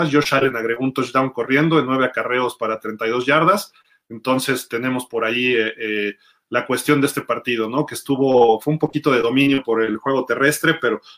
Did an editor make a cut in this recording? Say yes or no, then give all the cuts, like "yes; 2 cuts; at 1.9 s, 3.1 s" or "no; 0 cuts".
no; 0 cuts